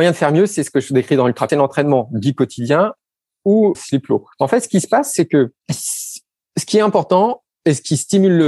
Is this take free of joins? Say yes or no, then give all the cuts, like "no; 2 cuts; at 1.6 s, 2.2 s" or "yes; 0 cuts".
no; 4 cuts; at 1.5 s, 3.7 s, 4.3 s, 5.6 s